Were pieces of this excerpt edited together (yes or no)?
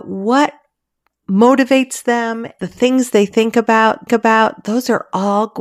yes